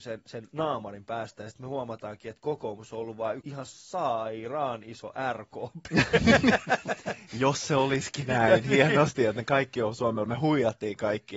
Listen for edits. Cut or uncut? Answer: cut